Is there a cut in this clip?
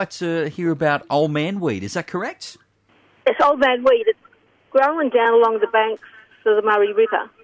no; 0 cuts

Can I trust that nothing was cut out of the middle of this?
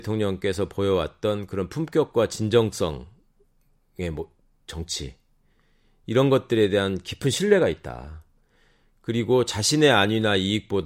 yes; 0 cuts

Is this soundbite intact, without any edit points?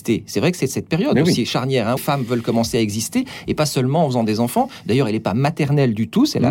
no; 1 cut; at 2.0 s

